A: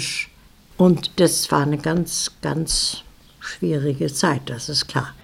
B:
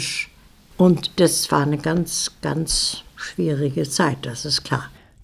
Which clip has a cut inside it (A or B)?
B